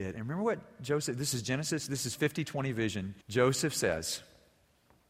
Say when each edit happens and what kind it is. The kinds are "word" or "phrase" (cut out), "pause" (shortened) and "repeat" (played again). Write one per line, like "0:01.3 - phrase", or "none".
0:03.2 - pause